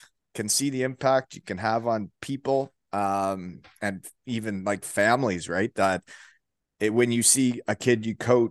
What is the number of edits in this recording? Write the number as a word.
zero